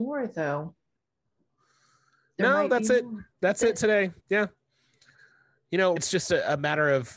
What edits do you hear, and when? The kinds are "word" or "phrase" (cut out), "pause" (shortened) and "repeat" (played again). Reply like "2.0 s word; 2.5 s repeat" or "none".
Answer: 3.3 s pause; 4.2 s pause; 6.0 s word